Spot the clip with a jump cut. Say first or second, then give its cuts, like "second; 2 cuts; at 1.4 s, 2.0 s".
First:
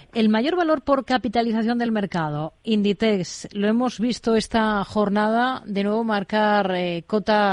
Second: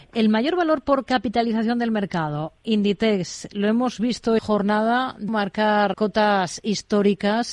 second; 3 cuts; at 4.4 s, 5.3 s, 5.9 s